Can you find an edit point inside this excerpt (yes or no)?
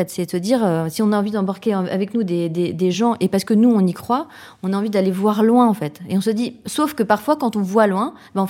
no